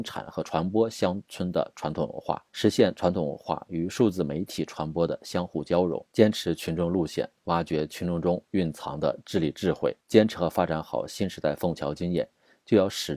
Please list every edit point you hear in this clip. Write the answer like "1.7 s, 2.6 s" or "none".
2.5 s, 10.0 s